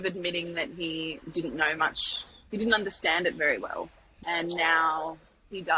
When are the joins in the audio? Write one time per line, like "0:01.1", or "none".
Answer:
none